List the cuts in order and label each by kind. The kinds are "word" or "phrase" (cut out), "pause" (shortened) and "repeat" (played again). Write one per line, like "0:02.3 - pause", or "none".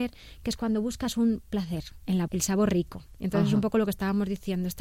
0:02.3 - word

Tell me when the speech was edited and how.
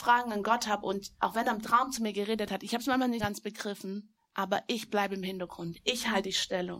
0:03.2 - word
0:04.2 - pause

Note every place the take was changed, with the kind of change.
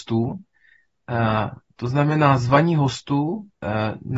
none

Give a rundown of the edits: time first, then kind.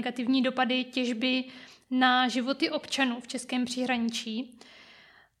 none

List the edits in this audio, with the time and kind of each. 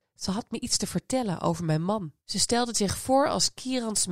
0:02.2 - pause

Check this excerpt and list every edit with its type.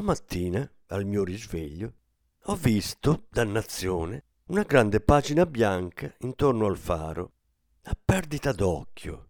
none

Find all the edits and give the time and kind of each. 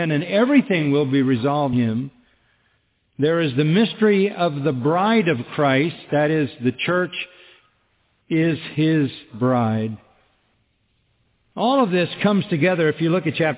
0:01.7 - word

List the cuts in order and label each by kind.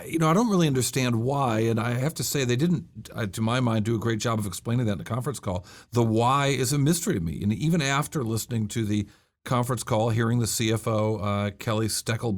none

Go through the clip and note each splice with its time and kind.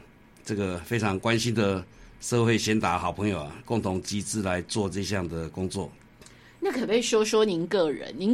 none

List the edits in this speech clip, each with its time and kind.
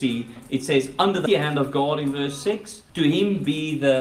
0:01.3 - word
0:02.9 - pause

